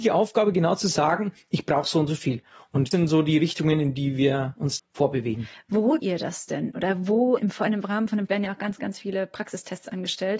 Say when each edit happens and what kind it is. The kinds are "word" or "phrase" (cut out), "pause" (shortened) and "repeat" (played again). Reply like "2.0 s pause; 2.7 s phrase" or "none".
2.9 s word; 4.8 s word; 6.0 s word; 7.4 s word; 8.3 s word